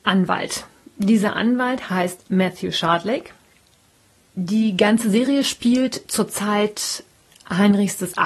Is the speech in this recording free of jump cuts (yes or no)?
yes